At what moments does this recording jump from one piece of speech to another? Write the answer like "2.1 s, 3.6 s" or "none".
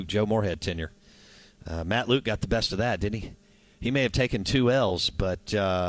none

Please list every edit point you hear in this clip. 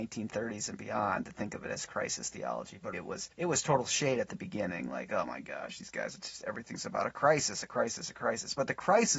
2.9 s, 3.3 s

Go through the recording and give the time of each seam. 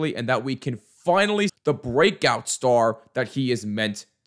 1.5 s

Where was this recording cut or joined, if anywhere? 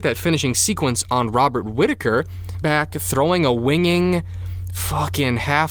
2.6 s

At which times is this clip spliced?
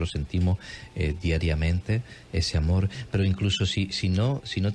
none

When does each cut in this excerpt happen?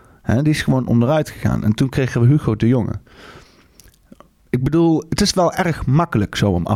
none

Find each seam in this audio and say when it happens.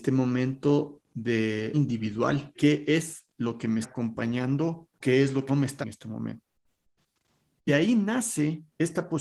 1.7 s, 2.5 s, 3.8 s, 5.0 s, 5.5 s, 5.8 s, 7.7 s

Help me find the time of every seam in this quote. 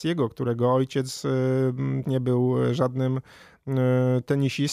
2.0 s

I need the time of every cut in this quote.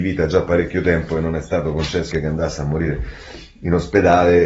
2.1 s

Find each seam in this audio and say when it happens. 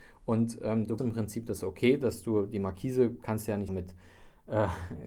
1.0 s, 3.7 s

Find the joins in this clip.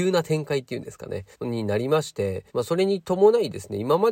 1.3 s, 2.5 s

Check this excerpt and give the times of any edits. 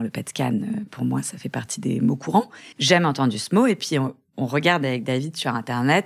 2.7 s

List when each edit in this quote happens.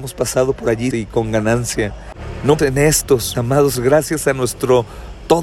0.9 s, 2.6 s, 3.3 s, 3.7 s

